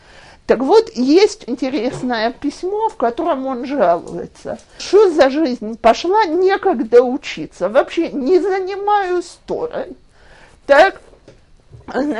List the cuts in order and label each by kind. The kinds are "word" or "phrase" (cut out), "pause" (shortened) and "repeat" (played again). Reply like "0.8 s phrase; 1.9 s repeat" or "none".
1.5 s word; 4.8 s word